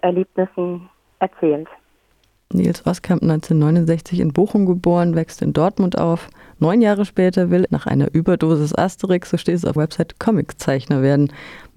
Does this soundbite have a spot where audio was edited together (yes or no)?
yes